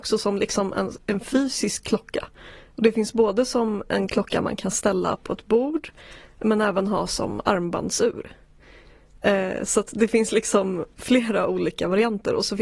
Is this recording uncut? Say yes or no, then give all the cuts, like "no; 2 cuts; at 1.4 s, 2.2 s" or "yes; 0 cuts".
yes; 0 cuts